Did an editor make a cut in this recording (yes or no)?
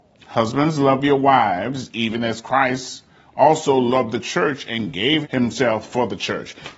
yes